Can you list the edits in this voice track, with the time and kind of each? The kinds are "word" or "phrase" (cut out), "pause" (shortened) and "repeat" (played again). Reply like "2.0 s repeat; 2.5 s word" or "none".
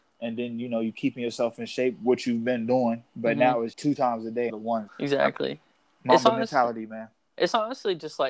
3.7 s word; 4.5 s word; 4.9 s word